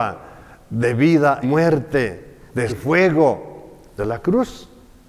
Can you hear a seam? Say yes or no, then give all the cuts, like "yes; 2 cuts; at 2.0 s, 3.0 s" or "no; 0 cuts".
yes; 3 cuts; at 1.4 s, 2.7 s, 4.0 s